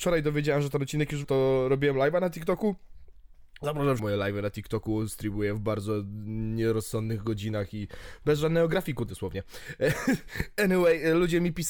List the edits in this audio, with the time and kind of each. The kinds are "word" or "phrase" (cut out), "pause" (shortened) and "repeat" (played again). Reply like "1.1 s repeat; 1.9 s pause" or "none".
1.2 s word; 4.0 s phrase; 9.1 s phrase